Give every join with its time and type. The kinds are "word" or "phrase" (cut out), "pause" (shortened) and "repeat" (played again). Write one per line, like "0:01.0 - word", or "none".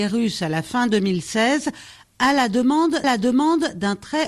0:03.0 - repeat